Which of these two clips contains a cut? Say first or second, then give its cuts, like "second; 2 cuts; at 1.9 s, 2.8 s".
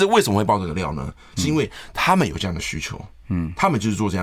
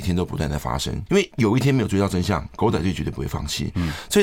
second; 1 cut; at 1.1 s